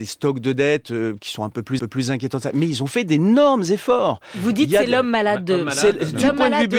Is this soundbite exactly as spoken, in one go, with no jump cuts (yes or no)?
no